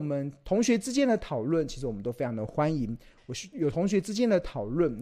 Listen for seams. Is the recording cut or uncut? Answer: uncut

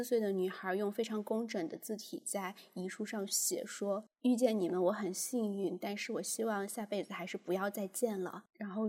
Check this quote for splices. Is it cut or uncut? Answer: uncut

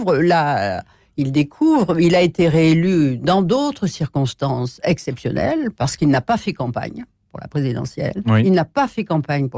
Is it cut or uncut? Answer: uncut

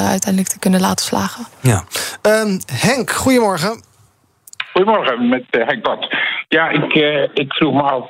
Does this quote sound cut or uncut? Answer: uncut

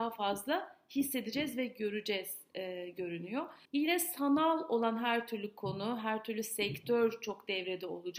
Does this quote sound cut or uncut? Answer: cut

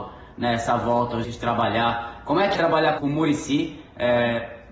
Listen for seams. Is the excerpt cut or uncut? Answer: cut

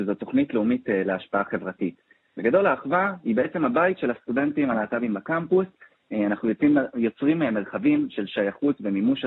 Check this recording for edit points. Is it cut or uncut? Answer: uncut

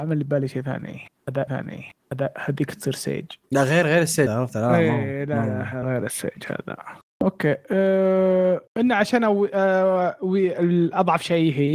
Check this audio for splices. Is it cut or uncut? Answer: cut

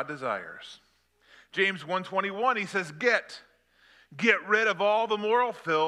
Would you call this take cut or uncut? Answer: uncut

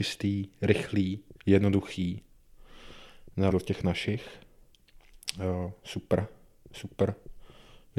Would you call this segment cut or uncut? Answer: cut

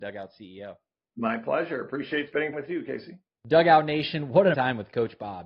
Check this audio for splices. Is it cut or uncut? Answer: cut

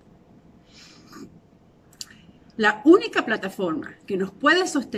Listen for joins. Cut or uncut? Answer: uncut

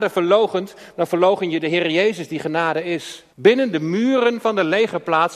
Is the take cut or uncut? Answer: cut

